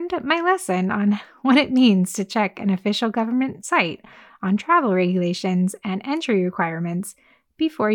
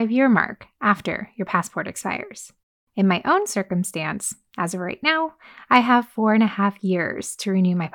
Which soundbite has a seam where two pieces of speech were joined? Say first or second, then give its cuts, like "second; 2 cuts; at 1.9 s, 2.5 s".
second; 1 cut; at 2.6 s